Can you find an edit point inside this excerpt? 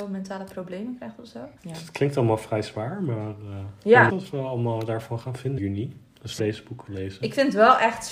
yes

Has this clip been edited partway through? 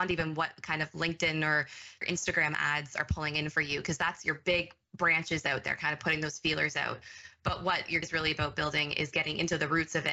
yes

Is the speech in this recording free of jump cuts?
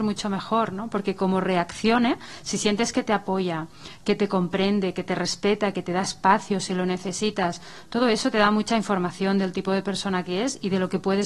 yes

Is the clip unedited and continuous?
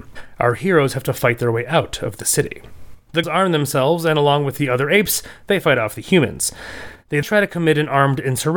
no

